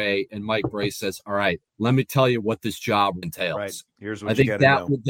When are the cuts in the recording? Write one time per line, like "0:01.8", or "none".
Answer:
0:01.7
0:03.2